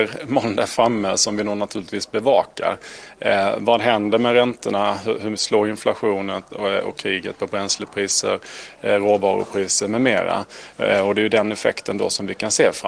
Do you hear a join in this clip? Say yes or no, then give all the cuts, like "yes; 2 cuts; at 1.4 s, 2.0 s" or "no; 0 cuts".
yes; 1 cut; at 5.4 s